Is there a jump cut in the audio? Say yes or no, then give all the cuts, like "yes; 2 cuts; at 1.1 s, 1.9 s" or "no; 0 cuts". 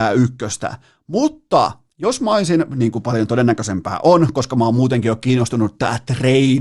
no; 0 cuts